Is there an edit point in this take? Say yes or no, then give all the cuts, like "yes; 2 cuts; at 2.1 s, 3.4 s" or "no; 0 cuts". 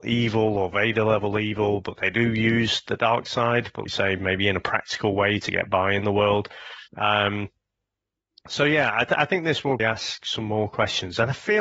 yes; 3 cuts; at 3.9 s, 6.9 s, 9.8 s